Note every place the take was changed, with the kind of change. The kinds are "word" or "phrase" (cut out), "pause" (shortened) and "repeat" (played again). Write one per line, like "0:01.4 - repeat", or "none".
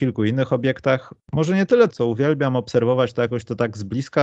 0:01.9 - phrase